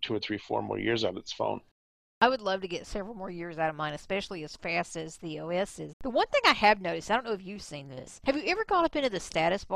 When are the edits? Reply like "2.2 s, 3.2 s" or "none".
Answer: 5.9 s